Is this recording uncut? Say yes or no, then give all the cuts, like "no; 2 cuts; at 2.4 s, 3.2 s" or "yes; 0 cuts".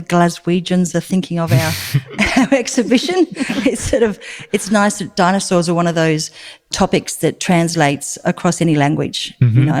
yes; 0 cuts